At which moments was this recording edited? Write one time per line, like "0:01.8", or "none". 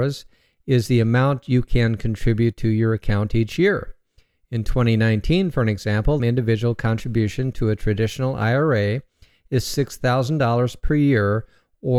0:06.2